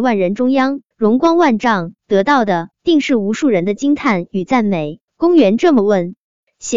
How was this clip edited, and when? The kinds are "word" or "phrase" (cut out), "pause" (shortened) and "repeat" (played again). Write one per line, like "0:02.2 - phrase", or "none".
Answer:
0:00.9 - pause
0:02.0 - pause
0:02.7 - pause
0:05.1 - pause